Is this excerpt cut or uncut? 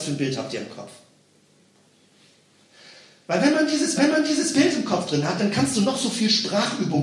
cut